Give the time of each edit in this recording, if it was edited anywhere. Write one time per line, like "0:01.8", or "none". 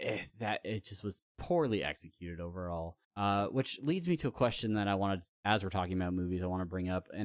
0:01.3
0:03.0
0:05.3